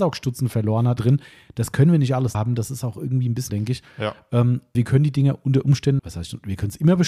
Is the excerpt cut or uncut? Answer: cut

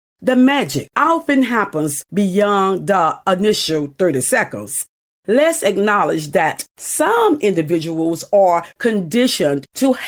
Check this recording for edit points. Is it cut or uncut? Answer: uncut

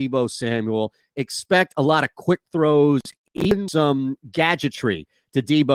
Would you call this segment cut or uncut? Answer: uncut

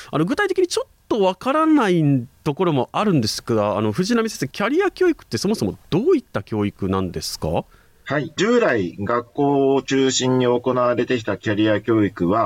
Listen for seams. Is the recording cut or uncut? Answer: uncut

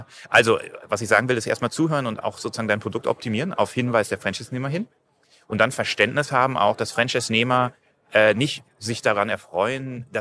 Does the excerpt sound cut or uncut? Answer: uncut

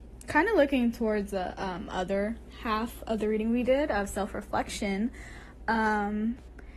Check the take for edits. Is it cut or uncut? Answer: uncut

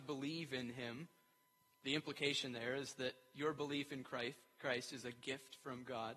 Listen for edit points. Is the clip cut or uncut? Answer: uncut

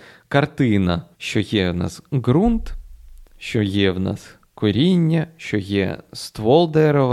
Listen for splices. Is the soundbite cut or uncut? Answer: cut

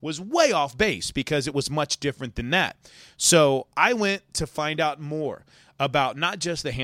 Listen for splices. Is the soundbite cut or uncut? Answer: uncut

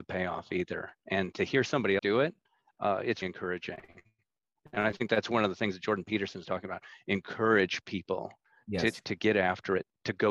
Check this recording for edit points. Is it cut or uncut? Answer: cut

